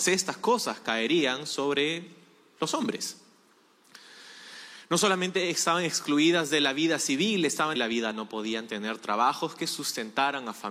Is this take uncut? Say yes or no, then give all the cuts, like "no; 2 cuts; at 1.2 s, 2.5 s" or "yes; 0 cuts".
no; 2 cuts; at 7.8 s, 8.1 s